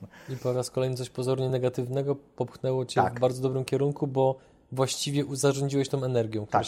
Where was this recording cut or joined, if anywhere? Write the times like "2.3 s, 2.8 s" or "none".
none